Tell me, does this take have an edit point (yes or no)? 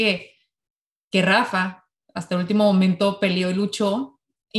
no